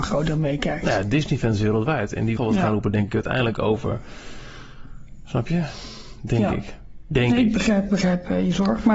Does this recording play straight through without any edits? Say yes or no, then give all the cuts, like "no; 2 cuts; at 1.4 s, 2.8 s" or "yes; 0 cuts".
no; 2 cuts; at 2.4 s, 7.9 s